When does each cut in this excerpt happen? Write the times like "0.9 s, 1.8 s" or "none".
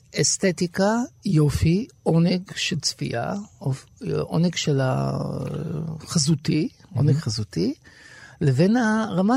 none